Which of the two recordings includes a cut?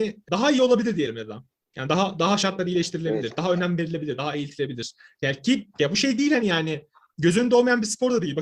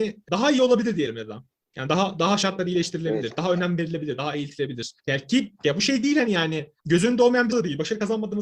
second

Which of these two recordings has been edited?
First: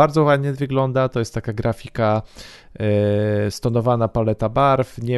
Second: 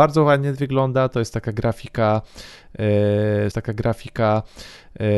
second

